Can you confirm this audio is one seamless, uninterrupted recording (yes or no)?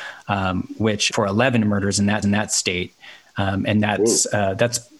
no